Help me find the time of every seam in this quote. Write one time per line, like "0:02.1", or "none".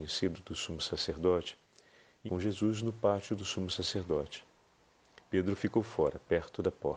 0:02.3